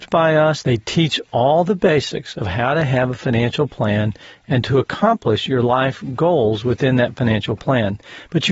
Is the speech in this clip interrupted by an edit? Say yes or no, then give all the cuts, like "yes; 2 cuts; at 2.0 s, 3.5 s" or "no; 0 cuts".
no; 0 cuts